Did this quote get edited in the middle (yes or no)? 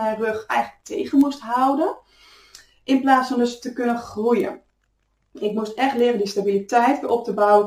no